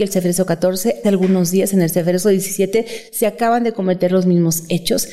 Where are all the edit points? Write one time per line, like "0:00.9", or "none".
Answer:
0:01.0